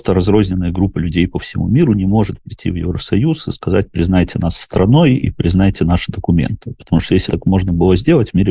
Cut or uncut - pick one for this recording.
cut